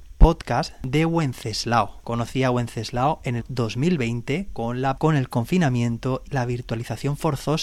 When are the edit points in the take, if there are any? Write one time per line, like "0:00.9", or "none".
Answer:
0:03.4
0:05.0
0:06.3